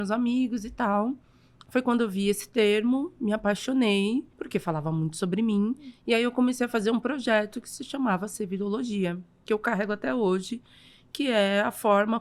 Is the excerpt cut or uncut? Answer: cut